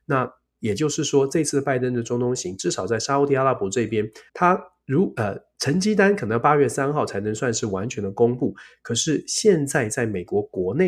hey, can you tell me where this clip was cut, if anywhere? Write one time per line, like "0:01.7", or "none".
0:04.3